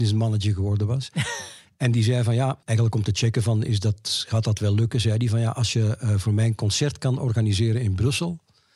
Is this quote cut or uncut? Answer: cut